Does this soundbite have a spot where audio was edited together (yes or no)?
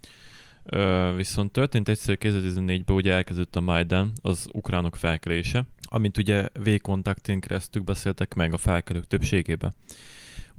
yes